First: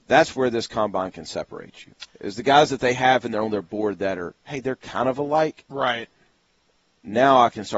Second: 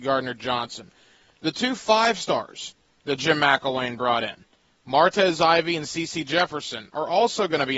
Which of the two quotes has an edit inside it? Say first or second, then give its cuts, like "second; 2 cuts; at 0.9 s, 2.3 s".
first; 1 cut; at 2.1 s